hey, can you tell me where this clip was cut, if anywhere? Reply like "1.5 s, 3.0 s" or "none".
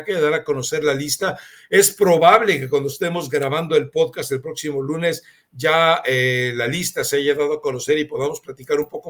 none